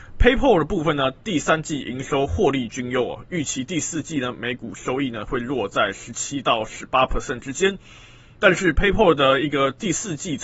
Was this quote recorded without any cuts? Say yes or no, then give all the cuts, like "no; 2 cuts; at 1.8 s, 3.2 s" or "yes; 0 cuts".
yes; 0 cuts